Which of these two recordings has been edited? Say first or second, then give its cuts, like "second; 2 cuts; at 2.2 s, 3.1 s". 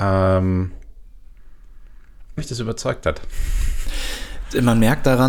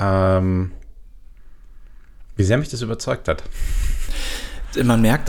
first; 1 cut; at 2.4 s